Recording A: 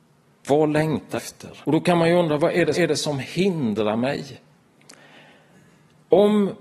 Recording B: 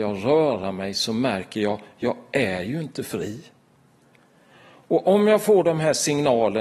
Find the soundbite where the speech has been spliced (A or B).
A